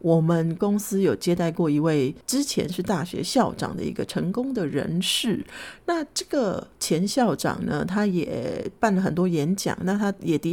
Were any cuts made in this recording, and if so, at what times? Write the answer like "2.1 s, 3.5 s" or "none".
6.7 s